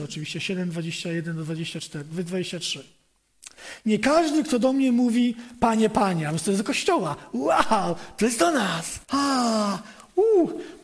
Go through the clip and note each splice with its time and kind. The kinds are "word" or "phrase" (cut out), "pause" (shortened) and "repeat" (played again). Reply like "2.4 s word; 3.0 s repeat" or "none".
9.0 s pause